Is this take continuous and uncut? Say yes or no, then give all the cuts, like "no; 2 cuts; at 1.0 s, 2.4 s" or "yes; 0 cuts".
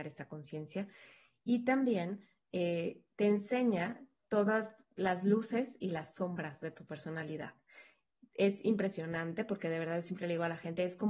yes; 0 cuts